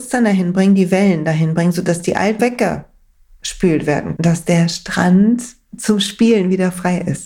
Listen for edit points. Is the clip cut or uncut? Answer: cut